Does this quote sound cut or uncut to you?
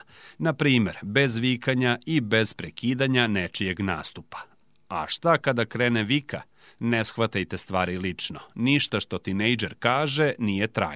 uncut